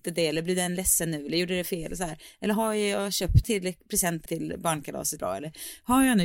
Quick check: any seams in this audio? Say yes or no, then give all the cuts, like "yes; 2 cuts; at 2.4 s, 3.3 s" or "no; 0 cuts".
yes; 3 cuts; at 3.4 s, 4.3 s, 5.2 s